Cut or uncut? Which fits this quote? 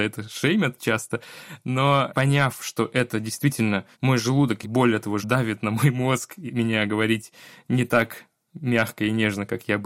cut